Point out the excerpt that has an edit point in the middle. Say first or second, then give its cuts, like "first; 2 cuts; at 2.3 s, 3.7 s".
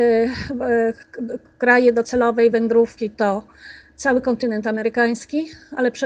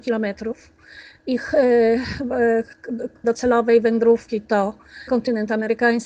second; 2 cuts; at 3.2 s, 5.1 s